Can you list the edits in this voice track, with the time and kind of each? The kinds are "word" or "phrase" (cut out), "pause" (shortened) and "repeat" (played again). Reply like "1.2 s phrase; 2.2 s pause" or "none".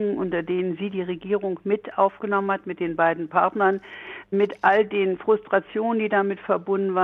none